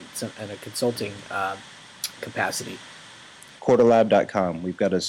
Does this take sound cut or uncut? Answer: uncut